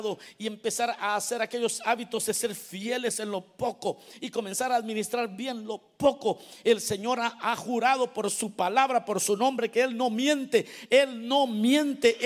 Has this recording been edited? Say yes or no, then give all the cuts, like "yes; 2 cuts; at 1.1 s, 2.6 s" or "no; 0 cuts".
no; 0 cuts